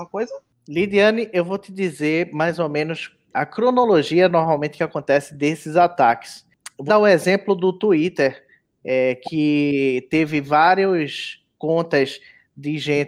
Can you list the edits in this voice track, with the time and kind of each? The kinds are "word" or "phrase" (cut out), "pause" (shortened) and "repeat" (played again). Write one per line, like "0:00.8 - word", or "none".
0:06.9 - word